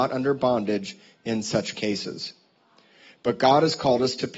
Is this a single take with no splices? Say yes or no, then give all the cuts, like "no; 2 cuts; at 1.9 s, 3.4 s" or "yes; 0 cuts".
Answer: yes; 0 cuts